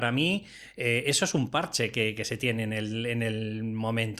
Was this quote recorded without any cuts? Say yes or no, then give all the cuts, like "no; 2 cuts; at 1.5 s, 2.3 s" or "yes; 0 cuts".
yes; 0 cuts